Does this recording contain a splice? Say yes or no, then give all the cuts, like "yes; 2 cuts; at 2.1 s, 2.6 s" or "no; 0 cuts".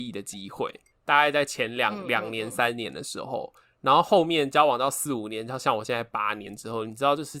no; 0 cuts